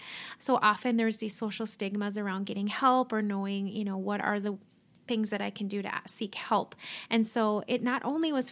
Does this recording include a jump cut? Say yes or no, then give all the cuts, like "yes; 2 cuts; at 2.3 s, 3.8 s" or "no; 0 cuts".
no; 0 cuts